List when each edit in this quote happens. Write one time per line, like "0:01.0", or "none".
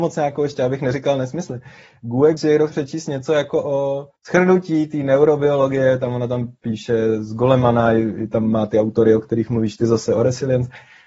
0:02.4
0:02.7
0:04.2